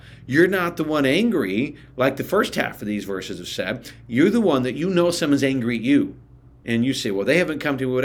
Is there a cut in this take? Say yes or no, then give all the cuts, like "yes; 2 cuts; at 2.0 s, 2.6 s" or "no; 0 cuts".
no; 0 cuts